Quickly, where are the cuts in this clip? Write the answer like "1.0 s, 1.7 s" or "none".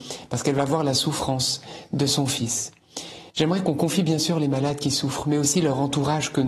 3.3 s